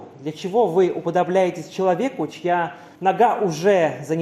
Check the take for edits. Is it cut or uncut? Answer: cut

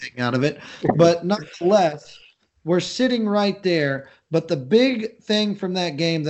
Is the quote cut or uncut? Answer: uncut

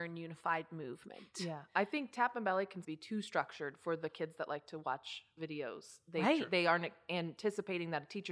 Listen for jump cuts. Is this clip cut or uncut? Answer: cut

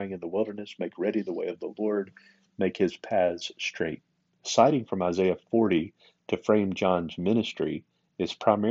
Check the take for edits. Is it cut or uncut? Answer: uncut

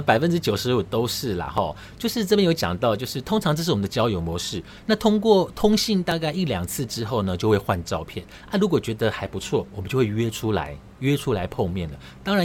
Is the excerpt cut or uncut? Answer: cut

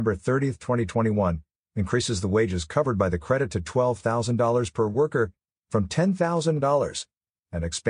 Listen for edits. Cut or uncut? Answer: uncut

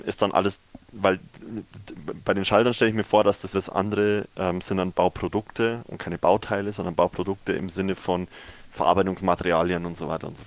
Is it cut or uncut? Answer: cut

